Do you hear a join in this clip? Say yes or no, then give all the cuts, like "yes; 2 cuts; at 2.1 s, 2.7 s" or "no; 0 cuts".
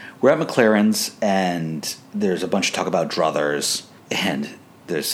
yes; 1 cut; at 4.0 s